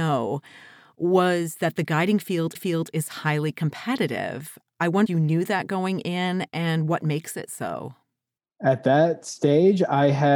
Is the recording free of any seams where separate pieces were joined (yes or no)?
no